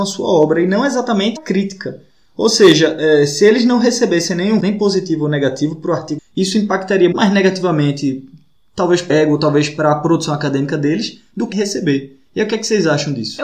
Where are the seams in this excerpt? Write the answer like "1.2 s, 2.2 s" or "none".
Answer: 1.4 s, 4.6 s, 6.2 s, 7.1 s, 9.1 s, 11.5 s